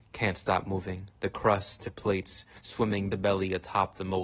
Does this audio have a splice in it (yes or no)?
yes